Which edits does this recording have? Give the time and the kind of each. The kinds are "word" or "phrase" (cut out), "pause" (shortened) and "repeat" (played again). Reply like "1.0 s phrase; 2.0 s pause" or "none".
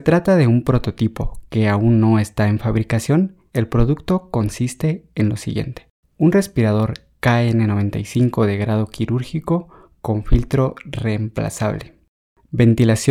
6.0 s pause